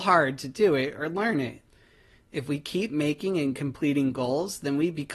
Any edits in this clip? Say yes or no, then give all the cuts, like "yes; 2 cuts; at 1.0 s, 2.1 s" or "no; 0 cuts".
no; 0 cuts